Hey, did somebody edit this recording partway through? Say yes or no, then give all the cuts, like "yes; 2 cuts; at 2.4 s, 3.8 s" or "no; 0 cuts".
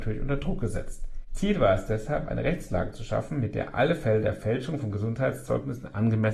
no; 0 cuts